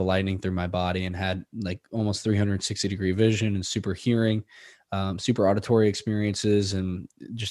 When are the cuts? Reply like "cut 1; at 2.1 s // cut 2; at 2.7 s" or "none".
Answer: none